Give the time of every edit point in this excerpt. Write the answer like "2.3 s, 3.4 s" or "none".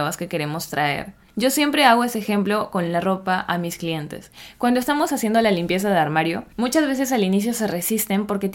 none